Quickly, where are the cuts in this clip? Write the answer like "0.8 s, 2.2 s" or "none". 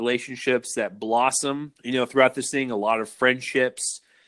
1.8 s